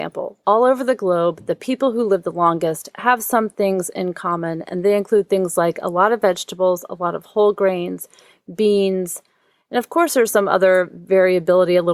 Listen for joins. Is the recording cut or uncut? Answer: uncut